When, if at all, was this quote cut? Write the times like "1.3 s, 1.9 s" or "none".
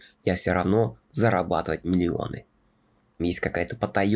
1.0 s, 3.2 s

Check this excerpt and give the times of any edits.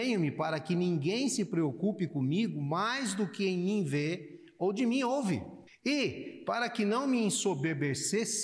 5.7 s

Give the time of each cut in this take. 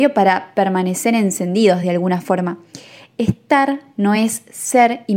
none

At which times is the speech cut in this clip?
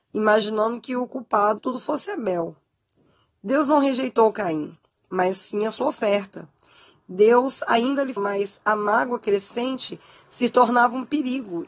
1.6 s, 8.2 s

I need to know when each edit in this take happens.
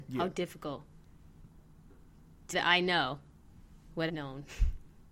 2.5 s, 4.1 s

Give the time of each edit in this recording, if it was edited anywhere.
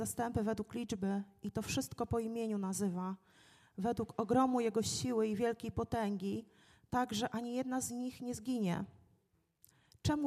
none

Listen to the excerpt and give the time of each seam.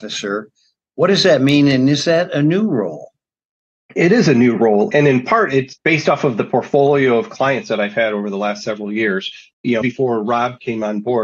9.8 s

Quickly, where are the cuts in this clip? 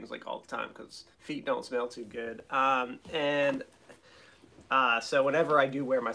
1.1 s

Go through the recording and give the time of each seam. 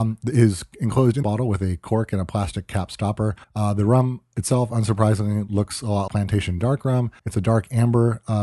1.2 s, 3.4 s, 6.1 s, 7.2 s

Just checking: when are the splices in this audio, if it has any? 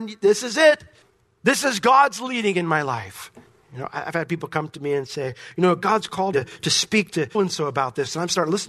1.0 s, 3.5 s, 6.3 s, 7.3 s

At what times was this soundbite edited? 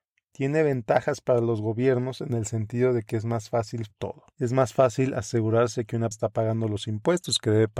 3.9 s, 4.3 s, 6.1 s

